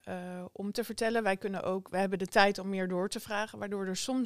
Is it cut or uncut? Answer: uncut